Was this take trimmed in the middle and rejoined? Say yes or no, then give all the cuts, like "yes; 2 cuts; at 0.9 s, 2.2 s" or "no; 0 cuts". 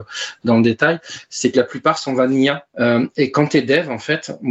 yes; 1 cut; at 2.7 s